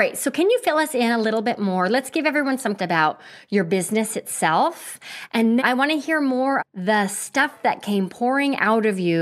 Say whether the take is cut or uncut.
cut